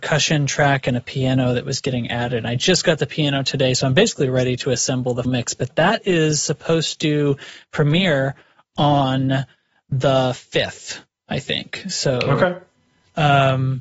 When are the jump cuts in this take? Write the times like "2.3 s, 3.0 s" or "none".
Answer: 5.2 s